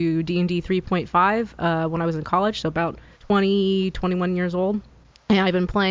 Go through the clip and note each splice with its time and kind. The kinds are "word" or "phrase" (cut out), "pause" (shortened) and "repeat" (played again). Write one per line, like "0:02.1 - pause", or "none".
0:03.1 - pause

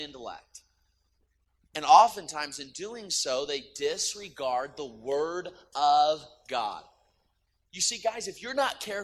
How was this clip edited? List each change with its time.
none

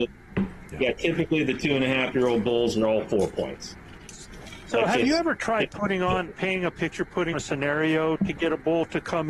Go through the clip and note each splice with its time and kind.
0:07.3 - word

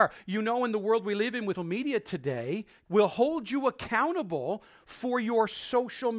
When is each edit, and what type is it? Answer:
0:01.5 - word
0:02.9 - word

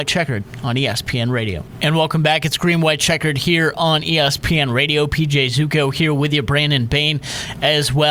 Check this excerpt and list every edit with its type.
none

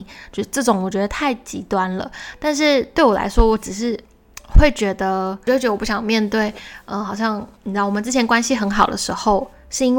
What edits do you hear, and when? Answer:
0:07.5 - pause

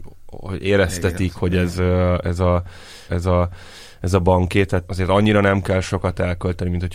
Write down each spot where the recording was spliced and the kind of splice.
0:03.1 - repeat

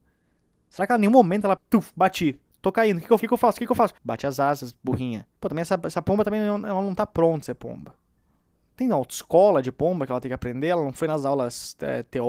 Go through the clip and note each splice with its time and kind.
0:01.6 - phrase
0:03.2 - word
0:04.0 - pause
0:05.4 - pause
0:07.4 - word
0:08.2 - pause

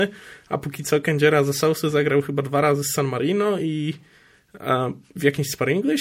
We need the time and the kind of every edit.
none

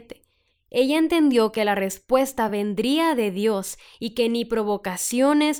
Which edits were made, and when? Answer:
none

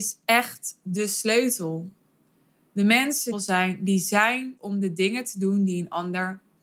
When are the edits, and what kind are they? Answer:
0:03.3 - phrase
0:04.6 - word

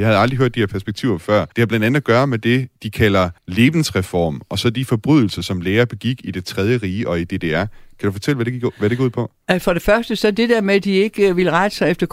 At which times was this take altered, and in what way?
0:01.5 - pause
0:02.8 - pause
0:03.4 - pause

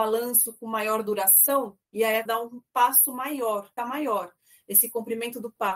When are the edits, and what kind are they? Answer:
0:01.8 - pause
0:02.3 - word
0:03.8 - phrase

